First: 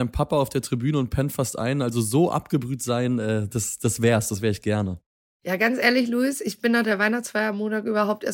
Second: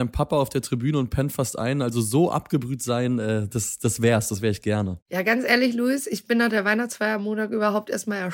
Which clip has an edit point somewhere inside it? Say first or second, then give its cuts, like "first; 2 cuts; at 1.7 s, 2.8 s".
second; 1 cut; at 5.0 s